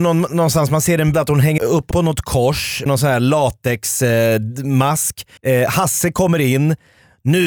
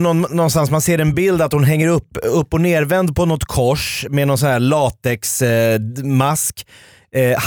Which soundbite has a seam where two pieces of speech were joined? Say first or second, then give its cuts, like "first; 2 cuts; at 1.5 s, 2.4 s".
first; 5 cuts; at 1.1 s, 1.6 s, 1.9 s, 2.9 s, 5.4 s